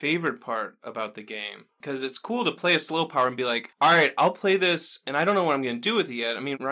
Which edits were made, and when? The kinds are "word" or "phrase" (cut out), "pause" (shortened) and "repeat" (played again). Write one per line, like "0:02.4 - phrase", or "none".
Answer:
none